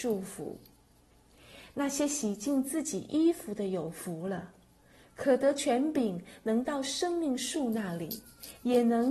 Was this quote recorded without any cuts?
yes; 0 cuts

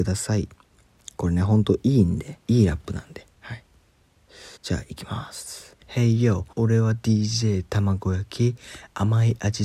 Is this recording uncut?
no; 5 cuts; at 2.4 s, 3.3 s, 4.6 s, 5.8 s, 6.5 s

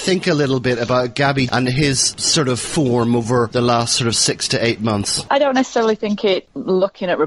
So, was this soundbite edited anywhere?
yes; 1 cut; at 1.5 s

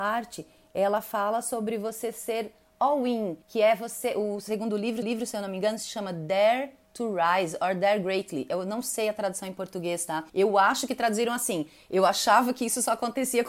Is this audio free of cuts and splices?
no; 4 cuts; at 3.4 s, 5.0 s, 6.8 s, 10.3 s

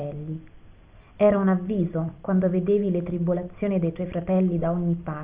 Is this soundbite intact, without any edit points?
yes; 0 cuts

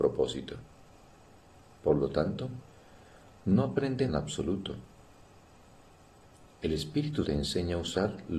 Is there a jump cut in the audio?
yes; 2 cuts; at 4.1 s, 7.2 s

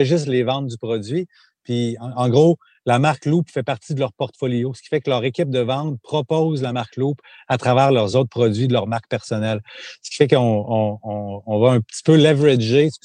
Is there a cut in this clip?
no; 0 cuts

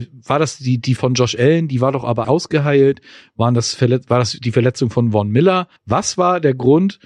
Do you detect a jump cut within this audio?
yes; 3 cuts; at 1.0 s, 2.2 s, 5.8 s

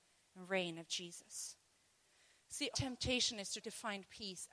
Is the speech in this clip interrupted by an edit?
yes; 2 cuts; at 2.7 s, 3.6 s

